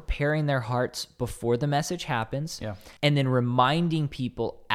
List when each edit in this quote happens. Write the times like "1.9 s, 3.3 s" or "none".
3.0 s